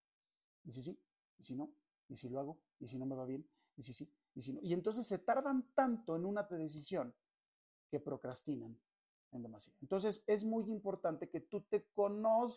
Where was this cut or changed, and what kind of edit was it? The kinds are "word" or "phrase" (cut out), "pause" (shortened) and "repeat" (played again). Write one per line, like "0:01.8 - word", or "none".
0:06.5 - word